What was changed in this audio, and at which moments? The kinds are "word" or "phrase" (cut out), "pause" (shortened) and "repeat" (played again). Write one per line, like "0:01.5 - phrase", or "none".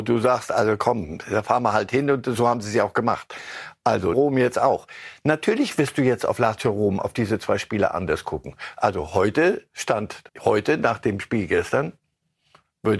0:04.1 - word
0:10.3 - pause